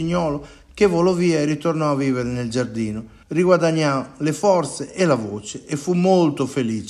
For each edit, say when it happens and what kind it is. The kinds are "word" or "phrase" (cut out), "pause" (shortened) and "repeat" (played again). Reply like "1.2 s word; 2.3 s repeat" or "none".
3.2 s pause